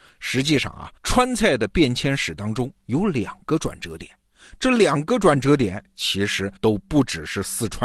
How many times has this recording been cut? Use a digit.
3